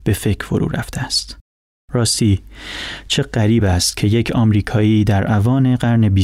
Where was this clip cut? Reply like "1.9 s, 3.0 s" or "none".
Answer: none